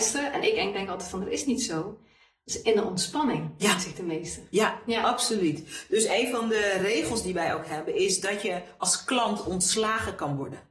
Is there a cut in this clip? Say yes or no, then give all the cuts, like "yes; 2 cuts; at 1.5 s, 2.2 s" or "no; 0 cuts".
no; 0 cuts